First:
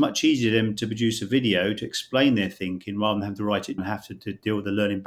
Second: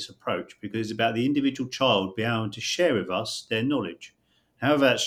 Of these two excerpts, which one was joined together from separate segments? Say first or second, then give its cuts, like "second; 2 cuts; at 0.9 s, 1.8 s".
first; 1 cut; at 3.8 s